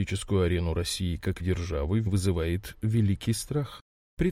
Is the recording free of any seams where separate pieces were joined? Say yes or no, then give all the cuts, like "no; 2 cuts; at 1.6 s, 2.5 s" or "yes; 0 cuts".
no; 2 cuts; at 1.4 s, 2.1 s